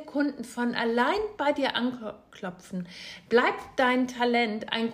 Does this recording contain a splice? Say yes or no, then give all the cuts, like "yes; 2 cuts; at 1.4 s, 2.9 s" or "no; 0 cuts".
no; 0 cuts